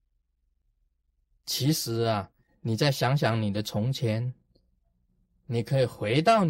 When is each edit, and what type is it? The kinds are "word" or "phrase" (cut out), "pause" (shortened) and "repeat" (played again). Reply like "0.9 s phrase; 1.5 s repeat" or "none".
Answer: none